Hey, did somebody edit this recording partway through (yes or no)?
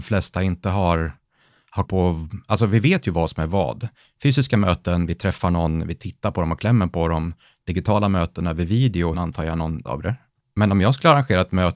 yes